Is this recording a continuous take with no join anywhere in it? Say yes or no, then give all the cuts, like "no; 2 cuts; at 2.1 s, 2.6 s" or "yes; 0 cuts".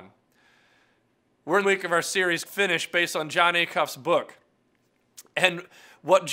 no; 2 cuts; at 1.6 s, 2.5 s